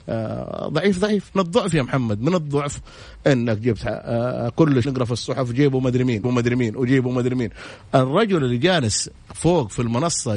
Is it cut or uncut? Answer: cut